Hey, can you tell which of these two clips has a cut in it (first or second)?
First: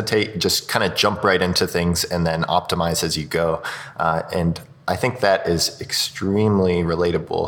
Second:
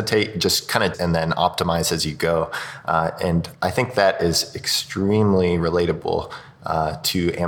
second